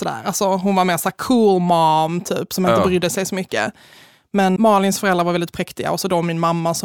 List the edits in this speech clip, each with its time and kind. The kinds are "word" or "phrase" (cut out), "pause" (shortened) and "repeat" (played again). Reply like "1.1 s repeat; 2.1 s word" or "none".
4.6 s word